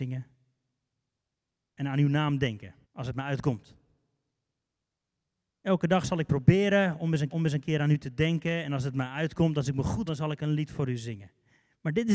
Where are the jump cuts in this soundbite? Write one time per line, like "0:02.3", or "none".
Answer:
0:02.8
0:07.3
0:10.1